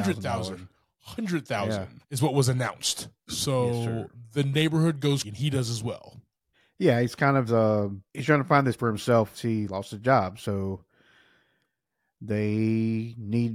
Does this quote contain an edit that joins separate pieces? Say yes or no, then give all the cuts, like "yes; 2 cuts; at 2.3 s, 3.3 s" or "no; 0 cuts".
yes; 8 cuts; at 2.0 s, 3.2 s, 5.2 s, 6.5 s, 7.5 s, 8.1 s, 8.8 s, 9.3 s